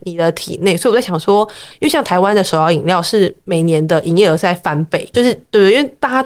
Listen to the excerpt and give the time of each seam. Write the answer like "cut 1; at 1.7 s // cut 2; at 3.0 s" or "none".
cut 1; at 5.1 s